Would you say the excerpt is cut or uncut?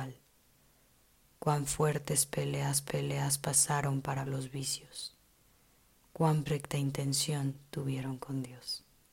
cut